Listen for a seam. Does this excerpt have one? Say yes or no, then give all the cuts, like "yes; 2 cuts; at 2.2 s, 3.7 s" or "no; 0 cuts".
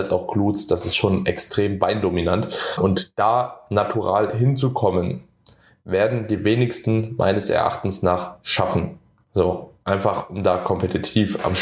no; 0 cuts